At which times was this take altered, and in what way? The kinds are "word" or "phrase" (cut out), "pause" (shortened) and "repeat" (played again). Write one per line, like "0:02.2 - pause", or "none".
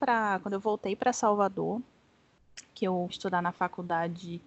0:03.1 - word